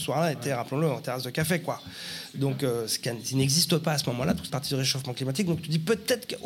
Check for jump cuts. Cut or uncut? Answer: cut